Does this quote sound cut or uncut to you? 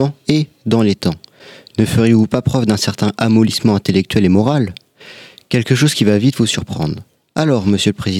uncut